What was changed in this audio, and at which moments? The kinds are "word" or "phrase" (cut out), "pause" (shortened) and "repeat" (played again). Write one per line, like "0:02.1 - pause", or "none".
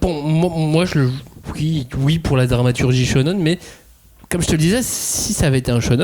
0:01.4 - pause